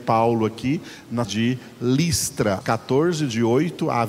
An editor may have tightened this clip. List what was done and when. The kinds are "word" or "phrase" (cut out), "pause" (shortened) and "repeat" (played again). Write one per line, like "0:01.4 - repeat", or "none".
0:01.2 - word
0:02.6 - word